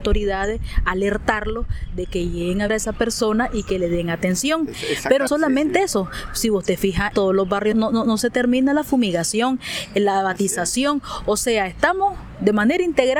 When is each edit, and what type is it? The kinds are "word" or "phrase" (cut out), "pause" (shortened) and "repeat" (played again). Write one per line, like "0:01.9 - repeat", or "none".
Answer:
0:02.7 - word
0:05.3 - word
0:07.1 - word
0:07.7 - word

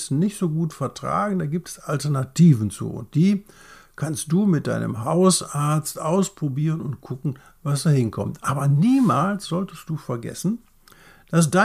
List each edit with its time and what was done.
none

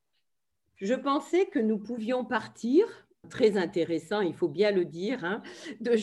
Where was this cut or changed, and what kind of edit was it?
0:03.2 - phrase

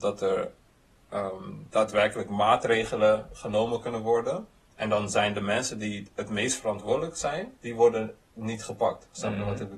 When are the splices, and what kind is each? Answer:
0:07.6 - pause

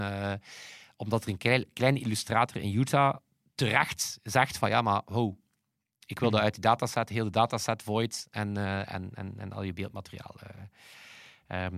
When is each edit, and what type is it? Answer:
none

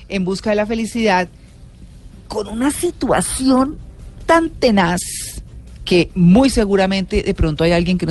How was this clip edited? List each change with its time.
none

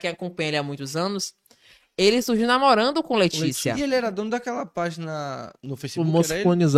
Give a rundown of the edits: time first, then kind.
none

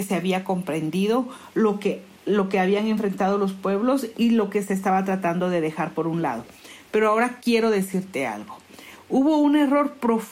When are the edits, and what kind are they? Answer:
0:04.1 - word

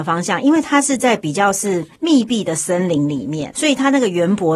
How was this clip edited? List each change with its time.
0:02.0 - pause
0:03.5 - word

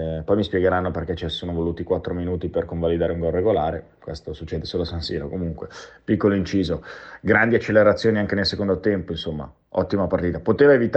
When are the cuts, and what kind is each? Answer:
none

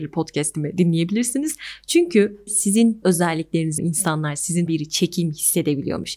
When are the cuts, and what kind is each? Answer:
0:02.5 - word
0:03.0 - word
0:03.8 - word
0:04.7 - word

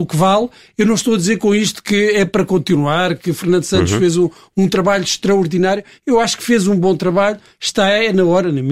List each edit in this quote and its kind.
none

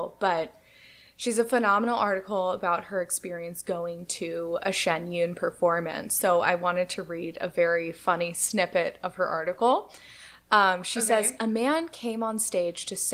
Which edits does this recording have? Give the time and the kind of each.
none

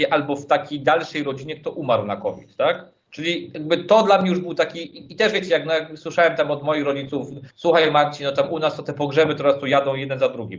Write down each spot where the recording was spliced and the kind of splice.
0:03.0 - pause
0:07.5 - pause

